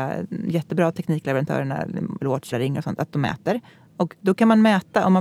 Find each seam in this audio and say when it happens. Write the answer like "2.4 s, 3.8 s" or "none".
2.2 s, 2.5 s, 4.2 s